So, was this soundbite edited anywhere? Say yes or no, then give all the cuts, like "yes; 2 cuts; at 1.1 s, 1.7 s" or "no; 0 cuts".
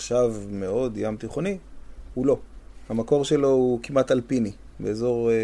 no; 0 cuts